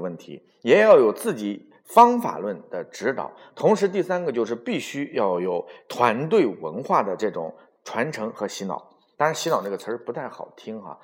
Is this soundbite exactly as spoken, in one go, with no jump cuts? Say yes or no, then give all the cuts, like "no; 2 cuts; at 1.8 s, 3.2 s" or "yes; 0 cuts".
yes; 0 cuts